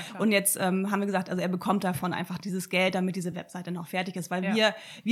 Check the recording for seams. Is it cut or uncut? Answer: uncut